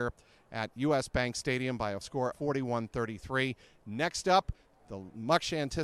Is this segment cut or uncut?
cut